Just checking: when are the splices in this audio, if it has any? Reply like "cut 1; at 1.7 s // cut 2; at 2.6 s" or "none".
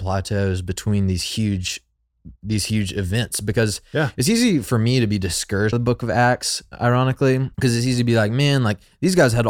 cut 1; at 2.4 s // cut 2; at 5.7 s // cut 3; at 7.5 s